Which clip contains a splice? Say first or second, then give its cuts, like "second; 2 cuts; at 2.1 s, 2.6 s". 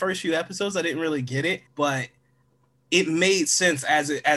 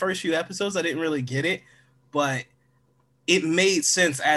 first; 1 cut; at 1.7 s